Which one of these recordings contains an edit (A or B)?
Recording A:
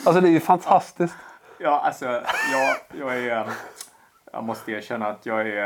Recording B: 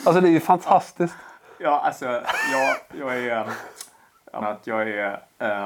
B